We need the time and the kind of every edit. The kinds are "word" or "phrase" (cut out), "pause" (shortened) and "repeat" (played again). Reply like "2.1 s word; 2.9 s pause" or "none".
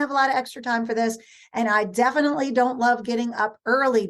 none

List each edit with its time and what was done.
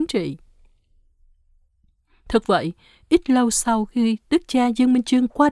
none

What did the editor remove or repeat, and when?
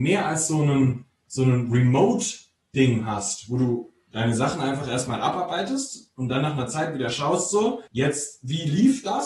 7.9 s pause

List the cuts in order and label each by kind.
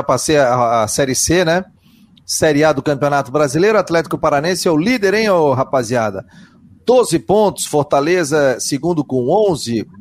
none

